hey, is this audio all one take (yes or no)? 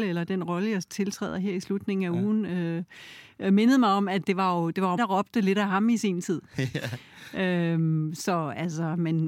no